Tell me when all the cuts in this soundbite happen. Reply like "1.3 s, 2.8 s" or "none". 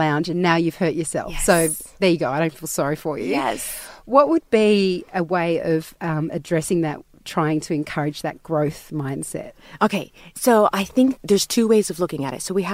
11.2 s